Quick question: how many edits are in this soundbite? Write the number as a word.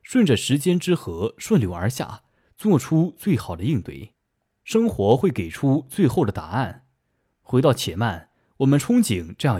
zero